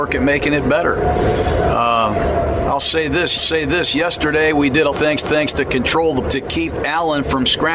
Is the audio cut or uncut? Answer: cut